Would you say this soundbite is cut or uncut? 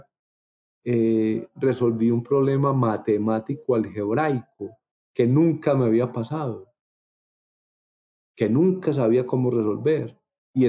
uncut